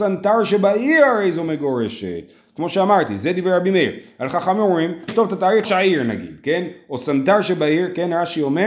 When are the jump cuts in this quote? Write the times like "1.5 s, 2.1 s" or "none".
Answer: 5.1 s, 5.6 s